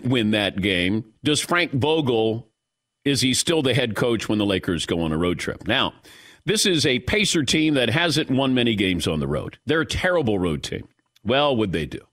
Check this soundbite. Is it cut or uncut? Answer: cut